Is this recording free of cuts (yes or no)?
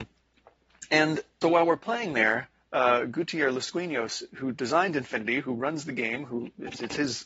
no